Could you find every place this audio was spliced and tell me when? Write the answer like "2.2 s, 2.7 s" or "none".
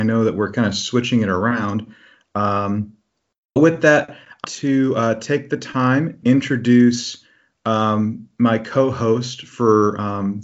3.6 s, 4.4 s, 6.2 s